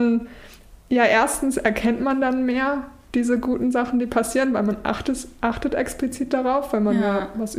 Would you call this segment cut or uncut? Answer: uncut